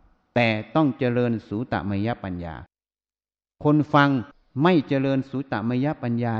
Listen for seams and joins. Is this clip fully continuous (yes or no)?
yes